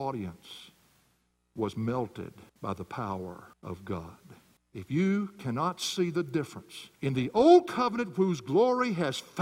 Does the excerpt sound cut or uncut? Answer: cut